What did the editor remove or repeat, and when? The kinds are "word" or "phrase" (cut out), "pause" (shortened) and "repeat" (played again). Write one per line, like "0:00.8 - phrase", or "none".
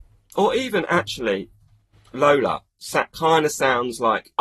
none